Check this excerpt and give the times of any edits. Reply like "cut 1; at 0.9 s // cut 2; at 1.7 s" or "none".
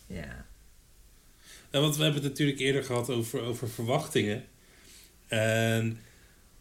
none